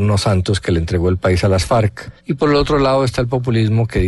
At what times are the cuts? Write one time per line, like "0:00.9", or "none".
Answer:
0:02.2

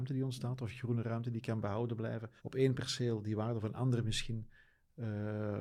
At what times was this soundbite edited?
0:02.4
0:03.6

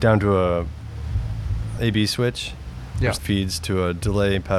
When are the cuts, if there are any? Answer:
0:01.8
0:03.2

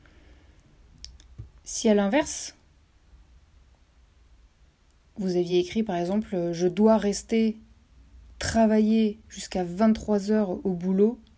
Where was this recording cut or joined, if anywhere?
none

